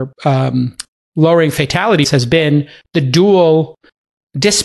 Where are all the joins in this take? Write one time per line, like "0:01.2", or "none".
0:02.0